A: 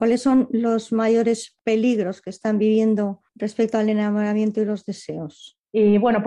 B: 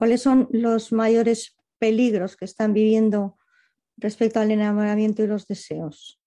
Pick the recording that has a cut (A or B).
A